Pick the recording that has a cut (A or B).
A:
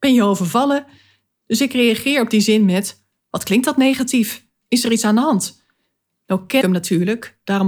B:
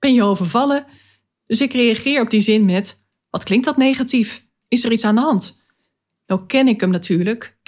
A